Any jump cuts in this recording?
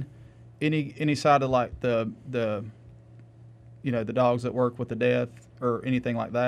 no; 0 cuts

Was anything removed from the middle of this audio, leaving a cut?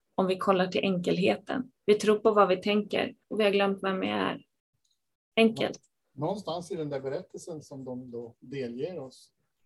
yes; 3 cuts; at 1.8 s, 3.2 s, 4.7 s

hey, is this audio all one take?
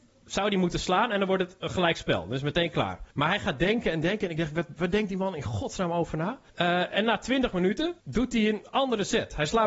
no; 3 cuts; at 3.1 s, 6.5 s, 8.0 s

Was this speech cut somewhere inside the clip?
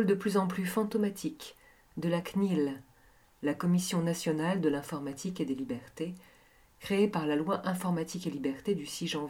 no; 0 cuts

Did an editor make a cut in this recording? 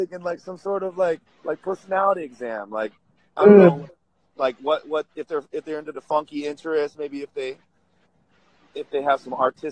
yes; 1 cut; at 1.3 s

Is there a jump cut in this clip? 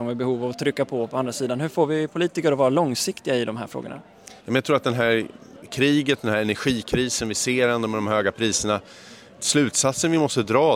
yes; 1 cut; at 4.4 s

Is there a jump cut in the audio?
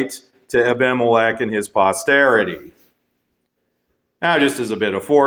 no; 0 cuts

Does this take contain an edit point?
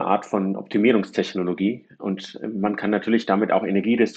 no; 0 cuts

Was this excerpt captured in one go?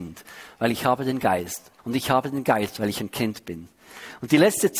no; 1 cut; at 1.8 s

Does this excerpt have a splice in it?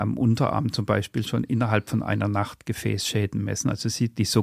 no; 0 cuts

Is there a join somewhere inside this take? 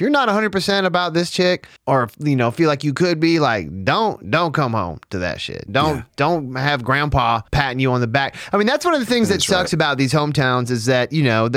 yes; 3 cuts; at 1.8 s, 5.7 s, 7.5 s

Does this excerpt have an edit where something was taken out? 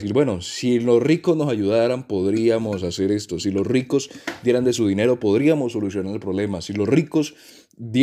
no; 0 cuts

